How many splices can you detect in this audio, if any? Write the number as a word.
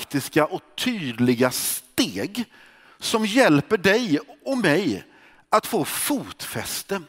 zero